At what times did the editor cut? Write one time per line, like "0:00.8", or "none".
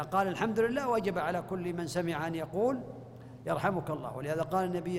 none